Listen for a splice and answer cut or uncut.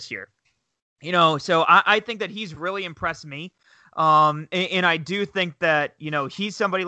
uncut